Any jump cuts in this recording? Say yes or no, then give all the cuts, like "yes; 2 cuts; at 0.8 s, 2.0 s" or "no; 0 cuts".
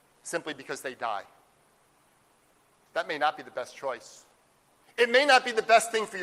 no; 0 cuts